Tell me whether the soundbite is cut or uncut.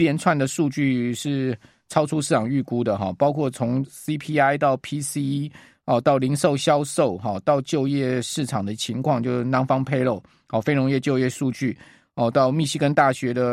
uncut